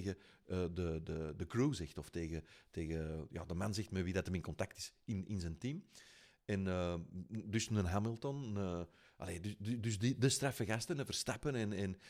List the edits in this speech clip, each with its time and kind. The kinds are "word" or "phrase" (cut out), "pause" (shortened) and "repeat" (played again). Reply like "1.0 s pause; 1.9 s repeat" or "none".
none